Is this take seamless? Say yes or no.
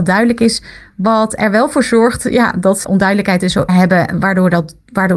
no